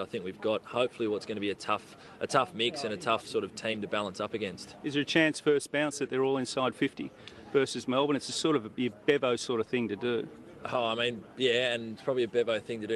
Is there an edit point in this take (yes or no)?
no